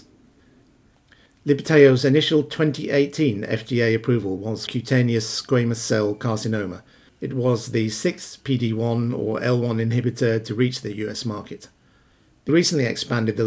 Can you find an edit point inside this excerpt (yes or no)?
yes